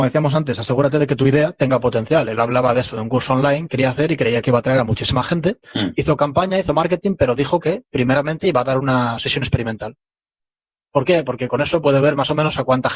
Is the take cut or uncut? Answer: cut